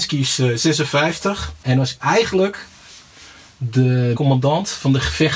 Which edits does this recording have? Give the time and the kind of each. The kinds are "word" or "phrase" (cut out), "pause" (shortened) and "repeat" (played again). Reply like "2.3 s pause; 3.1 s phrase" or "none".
1.6 s pause; 2.0 s word; 4.1 s word

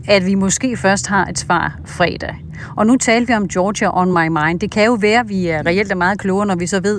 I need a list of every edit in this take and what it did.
none

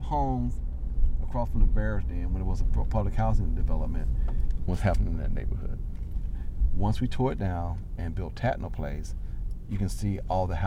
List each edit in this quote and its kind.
4.7 s word

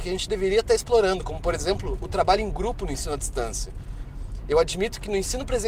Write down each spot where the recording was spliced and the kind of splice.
none

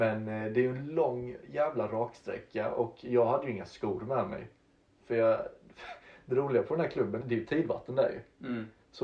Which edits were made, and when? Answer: 7.2 s word

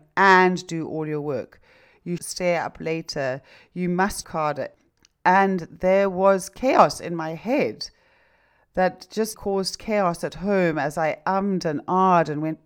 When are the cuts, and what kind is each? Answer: 2.2 s word; 4.2 s word; 9.3 s word

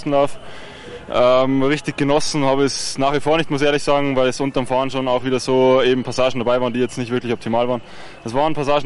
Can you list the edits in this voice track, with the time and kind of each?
none

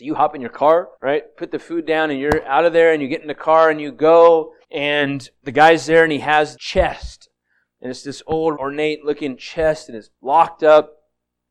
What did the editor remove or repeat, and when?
0.9 s pause; 4.6 s pause; 6.5 s word; 8.5 s word

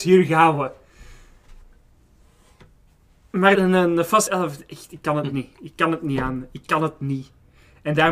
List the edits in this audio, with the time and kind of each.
3.5 s word; 4.3 s phrase

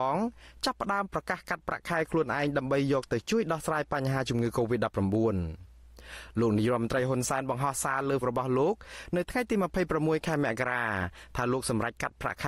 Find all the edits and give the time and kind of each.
8.2 s word

